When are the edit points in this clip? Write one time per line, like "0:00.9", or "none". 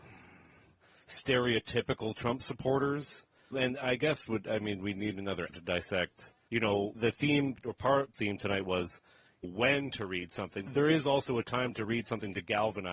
0:03.5
0:04.3
0:05.5
0:06.5
0:06.9
0:07.6
0:08.1
0:09.4
0:10.7